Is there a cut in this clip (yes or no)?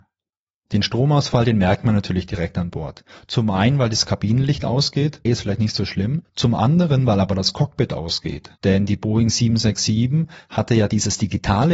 yes